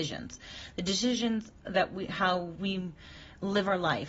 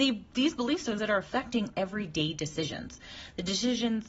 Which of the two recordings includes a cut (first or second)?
second